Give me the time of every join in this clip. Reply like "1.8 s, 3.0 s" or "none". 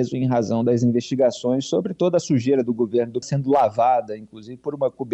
3.2 s

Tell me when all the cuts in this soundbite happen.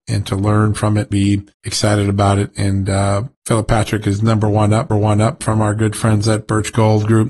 1.1 s, 1.5 s, 3.3 s, 4.9 s

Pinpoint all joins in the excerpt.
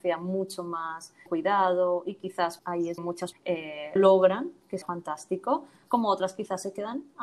1.3 s, 2.6 s, 3.0 s, 3.3 s, 4.0 s, 4.8 s

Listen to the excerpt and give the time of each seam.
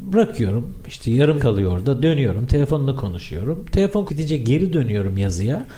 1.4 s, 4.1 s

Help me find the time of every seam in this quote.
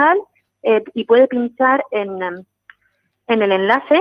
none

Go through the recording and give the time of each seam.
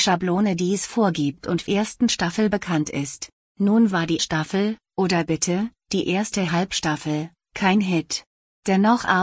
1.7 s, 3.4 s, 4.2 s

